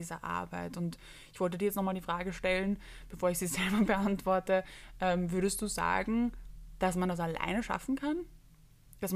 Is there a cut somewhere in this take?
no; 0 cuts

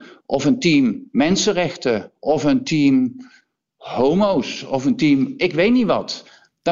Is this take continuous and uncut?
yes; 0 cuts

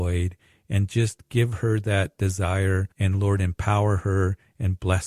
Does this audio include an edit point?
yes; 1 cut; at 2.9 s

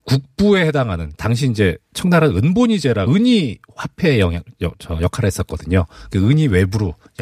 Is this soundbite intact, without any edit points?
no; 1 cut; at 3.1 s

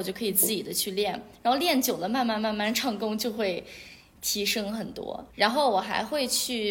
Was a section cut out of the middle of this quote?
yes; 1 cut; at 5.3 s

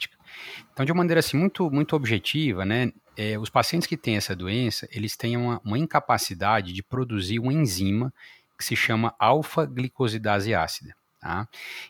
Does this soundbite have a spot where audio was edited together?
no; 0 cuts

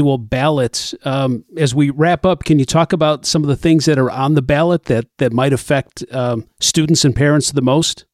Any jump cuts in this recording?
no; 0 cuts

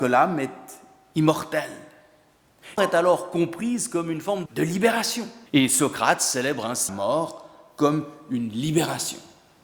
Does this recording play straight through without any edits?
no; 4 cuts; at 2.8 s, 4.5 s, 5.5 s, 6.9 s

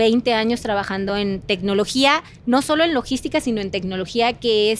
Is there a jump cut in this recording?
no; 0 cuts

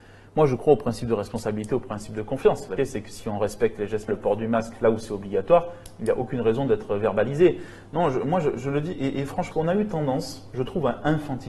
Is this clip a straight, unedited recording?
no; 4 cuts; at 2.8 s, 4.1 s, 8.9 s, 9.5 s

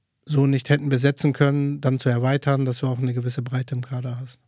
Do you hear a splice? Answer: no; 0 cuts

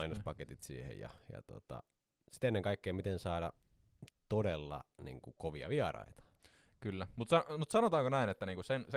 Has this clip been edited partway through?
no; 0 cuts

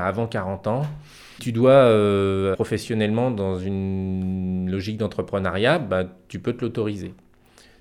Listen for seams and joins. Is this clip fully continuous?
no; 2 cuts; at 1.4 s, 2.5 s

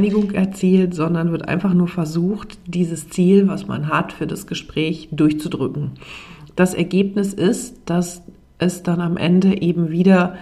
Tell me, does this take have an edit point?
no; 0 cuts

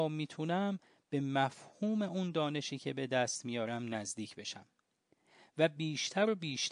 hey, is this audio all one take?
yes; 0 cuts

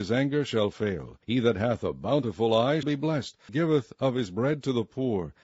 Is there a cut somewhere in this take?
yes; 3 cuts; at 1.2 s, 2.8 s, 3.5 s

